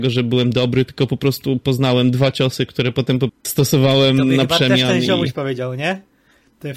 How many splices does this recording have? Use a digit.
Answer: 1